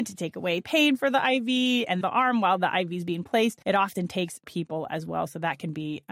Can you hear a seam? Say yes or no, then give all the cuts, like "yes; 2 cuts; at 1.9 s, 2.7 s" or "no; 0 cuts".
yes; 3 cuts; at 2.0 s, 3.6 s, 4.4 s